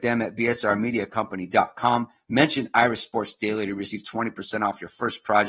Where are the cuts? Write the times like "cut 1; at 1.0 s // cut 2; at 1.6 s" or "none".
none